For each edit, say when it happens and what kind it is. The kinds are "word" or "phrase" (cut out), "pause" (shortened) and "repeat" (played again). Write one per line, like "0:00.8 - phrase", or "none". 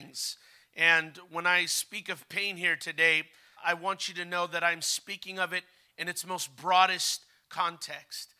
0:03.6 - word